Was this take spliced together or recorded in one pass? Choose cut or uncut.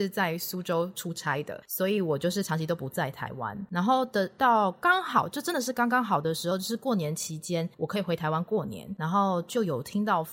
cut